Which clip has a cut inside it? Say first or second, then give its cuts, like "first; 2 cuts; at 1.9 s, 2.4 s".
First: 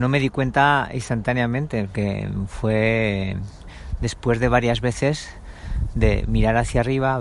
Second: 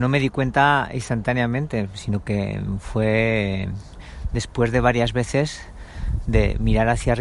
first; 1 cut; at 1.9 s